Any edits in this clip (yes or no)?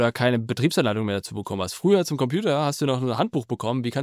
no